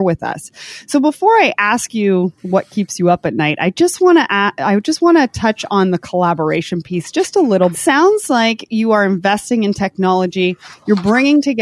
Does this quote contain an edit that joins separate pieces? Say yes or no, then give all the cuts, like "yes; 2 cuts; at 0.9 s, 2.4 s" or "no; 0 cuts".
yes; 2 cuts; at 2.4 s, 7.7 s